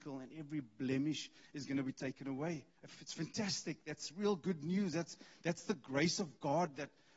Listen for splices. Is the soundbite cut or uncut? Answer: cut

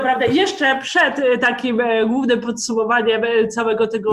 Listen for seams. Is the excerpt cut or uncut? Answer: uncut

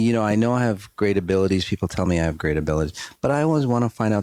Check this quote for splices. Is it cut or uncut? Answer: uncut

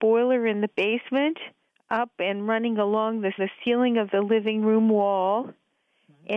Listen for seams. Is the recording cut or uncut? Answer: cut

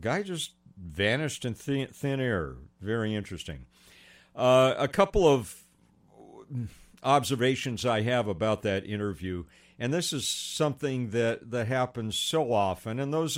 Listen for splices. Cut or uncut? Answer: uncut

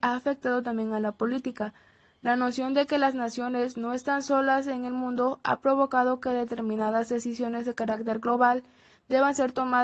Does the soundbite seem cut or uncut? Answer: uncut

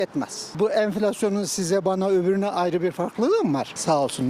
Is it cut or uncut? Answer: uncut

